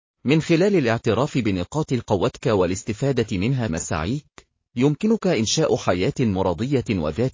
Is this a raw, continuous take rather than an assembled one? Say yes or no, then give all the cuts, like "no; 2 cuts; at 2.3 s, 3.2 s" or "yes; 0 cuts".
no; 1 cut; at 3.7 s